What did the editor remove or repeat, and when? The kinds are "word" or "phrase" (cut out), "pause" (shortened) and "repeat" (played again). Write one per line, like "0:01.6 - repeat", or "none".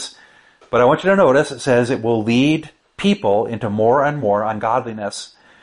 none